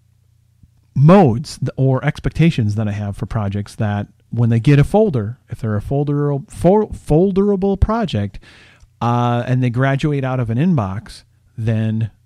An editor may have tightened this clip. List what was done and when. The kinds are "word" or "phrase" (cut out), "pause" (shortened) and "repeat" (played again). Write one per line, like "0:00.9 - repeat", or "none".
none